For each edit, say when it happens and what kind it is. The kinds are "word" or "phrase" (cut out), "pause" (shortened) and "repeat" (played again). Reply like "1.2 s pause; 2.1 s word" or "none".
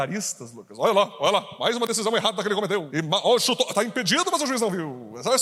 none